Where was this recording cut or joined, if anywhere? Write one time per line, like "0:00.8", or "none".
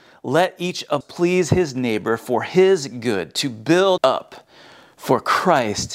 0:01.0
0:04.0